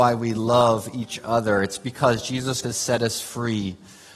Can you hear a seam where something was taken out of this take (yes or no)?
yes